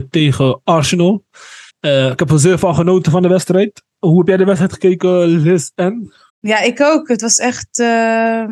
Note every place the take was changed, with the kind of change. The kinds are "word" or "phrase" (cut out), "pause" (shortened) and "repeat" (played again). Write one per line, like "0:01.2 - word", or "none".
0:01.7 - pause
0:06.3 - pause